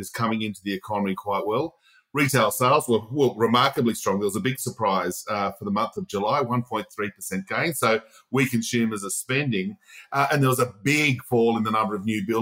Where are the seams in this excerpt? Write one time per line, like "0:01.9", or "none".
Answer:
none